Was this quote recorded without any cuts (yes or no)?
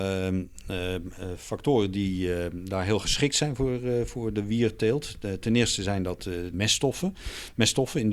no